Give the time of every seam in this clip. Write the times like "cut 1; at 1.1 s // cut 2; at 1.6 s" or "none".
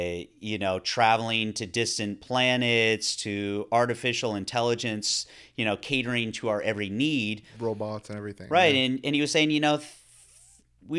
none

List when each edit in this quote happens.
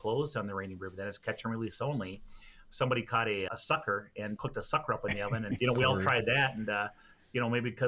cut 1; at 3.5 s // cut 2; at 4.4 s // cut 3; at 5.6 s

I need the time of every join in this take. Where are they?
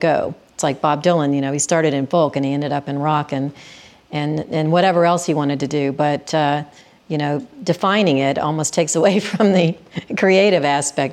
none

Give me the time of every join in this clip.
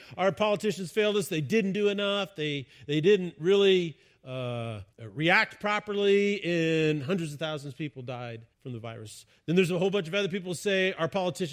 cut 1; at 4.9 s // cut 2; at 8.5 s

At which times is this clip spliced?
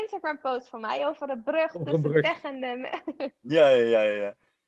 none

